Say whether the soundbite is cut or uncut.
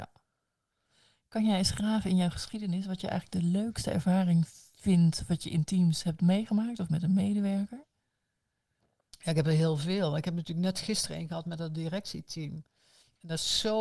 uncut